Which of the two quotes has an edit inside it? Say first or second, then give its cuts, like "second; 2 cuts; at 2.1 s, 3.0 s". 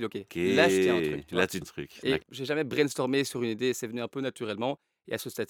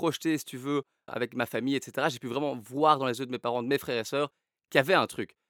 first; 2 cuts; at 1.6 s, 2.2 s